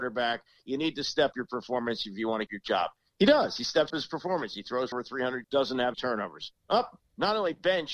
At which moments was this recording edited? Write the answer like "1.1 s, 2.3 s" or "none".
1.3 s, 2.5 s, 3.9 s, 4.9 s, 5.4 s, 5.9 s